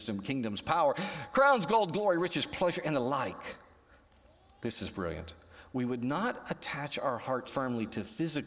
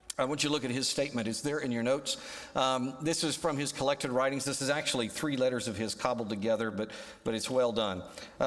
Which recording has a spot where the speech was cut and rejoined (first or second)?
first